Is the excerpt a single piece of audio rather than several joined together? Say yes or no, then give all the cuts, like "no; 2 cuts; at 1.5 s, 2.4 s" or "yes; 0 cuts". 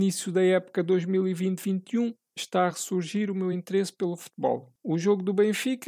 yes; 0 cuts